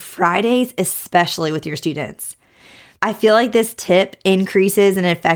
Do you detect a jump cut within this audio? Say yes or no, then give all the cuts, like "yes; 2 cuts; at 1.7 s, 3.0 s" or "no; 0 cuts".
no; 0 cuts